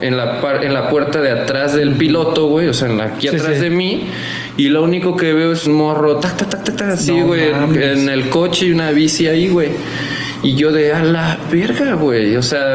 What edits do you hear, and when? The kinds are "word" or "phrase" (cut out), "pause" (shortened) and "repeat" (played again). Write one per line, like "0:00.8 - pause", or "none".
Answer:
0:05.7 - word